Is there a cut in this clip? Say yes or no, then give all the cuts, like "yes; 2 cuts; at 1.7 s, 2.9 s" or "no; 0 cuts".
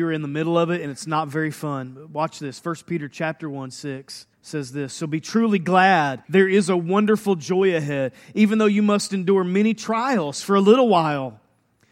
yes; 2 cuts; at 4.3 s, 6.2 s